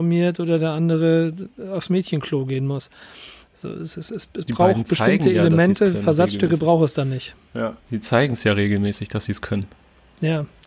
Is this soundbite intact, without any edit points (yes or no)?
no